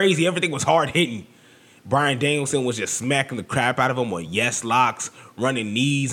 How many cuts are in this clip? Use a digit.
0